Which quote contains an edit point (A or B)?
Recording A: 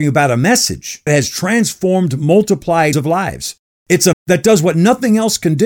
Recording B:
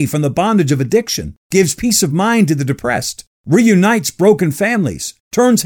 A